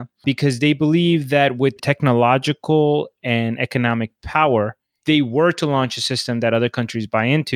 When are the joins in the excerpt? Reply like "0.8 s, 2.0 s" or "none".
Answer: 1.8 s, 5.0 s